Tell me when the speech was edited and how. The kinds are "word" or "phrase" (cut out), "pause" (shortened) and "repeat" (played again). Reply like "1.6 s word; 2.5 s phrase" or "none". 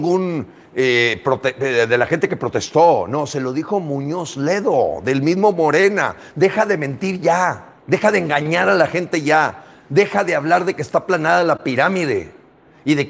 7.8 s pause